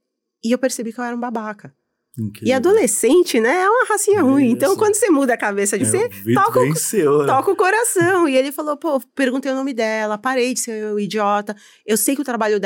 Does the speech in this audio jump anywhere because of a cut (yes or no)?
yes